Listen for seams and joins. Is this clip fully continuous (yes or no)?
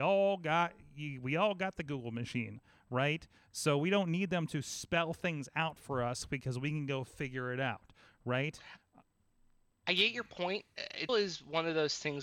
no